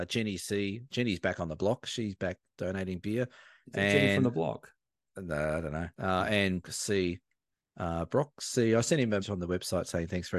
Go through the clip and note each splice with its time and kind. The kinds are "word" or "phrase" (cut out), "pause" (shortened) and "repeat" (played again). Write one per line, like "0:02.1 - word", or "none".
0:05.9 - pause
0:06.6 - word
0:09.2 - word